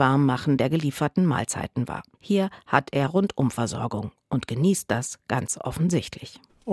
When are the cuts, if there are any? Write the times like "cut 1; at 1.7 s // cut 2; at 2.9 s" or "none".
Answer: cut 1; at 2.1 s